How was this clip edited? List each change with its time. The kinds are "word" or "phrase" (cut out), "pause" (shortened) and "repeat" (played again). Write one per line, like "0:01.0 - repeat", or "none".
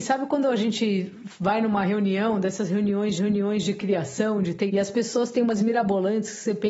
0:03.2 - repeat
0:04.7 - word
0:05.6 - word